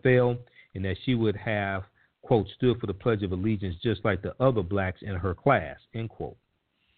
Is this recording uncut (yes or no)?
yes